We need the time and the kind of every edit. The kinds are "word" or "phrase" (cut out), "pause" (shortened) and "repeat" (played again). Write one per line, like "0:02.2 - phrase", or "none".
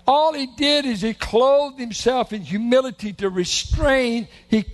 none